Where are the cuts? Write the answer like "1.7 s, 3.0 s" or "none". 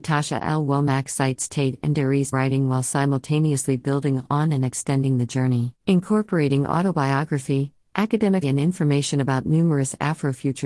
2.3 s, 5.8 s, 8.4 s